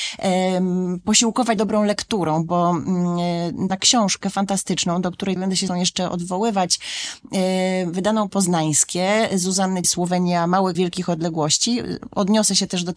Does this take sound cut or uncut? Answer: cut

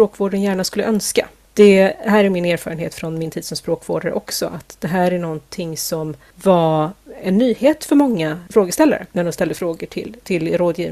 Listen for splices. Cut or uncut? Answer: uncut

